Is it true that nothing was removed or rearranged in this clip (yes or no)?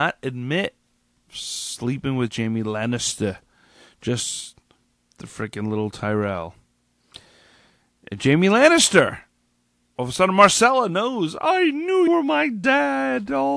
no